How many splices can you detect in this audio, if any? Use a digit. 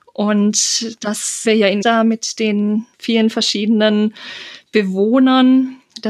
3